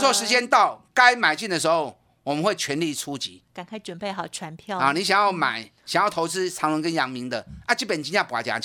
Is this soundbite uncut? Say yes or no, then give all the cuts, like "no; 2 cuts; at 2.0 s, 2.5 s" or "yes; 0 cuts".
no; 1 cut; at 5.8 s